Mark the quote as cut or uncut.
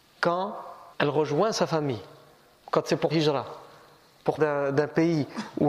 cut